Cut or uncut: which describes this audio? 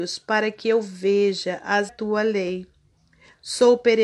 cut